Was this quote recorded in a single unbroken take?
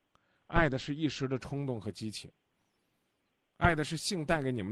yes; 0 cuts

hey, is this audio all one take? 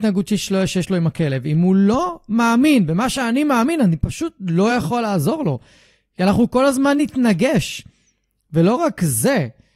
yes; 0 cuts

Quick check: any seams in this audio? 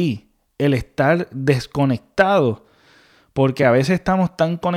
no; 0 cuts

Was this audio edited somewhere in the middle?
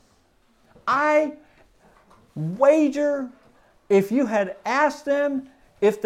no; 0 cuts

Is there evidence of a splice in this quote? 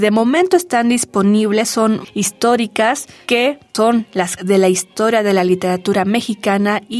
yes; 2 cuts; at 2.0 s, 4.4 s

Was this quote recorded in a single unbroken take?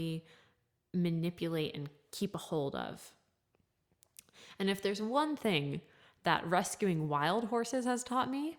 yes; 0 cuts

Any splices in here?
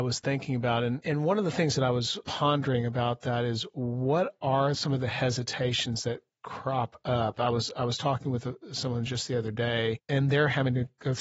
no; 0 cuts

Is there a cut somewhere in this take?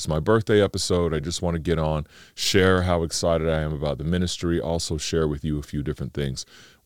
no; 0 cuts

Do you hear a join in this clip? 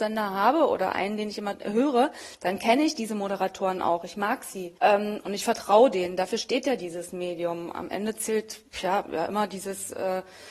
yes; 1 cut; at 4.8 s

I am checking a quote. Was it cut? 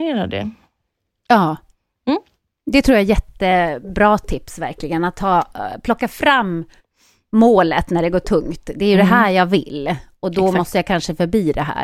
no; 0 cuts

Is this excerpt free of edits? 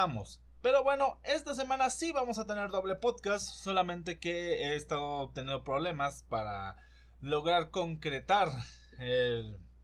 yes; 0 cuts

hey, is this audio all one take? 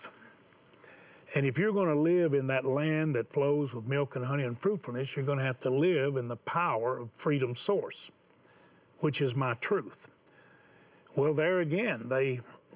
yes; 0 cuts

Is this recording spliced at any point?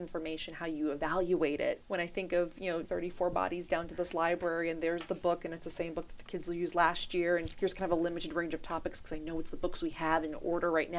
yes; 1 cut; at 2.8 s

